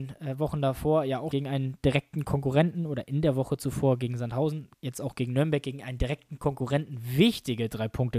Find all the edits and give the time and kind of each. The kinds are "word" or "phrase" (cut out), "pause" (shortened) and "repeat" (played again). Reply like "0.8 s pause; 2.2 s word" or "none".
1.3 s word; 4.7 s pause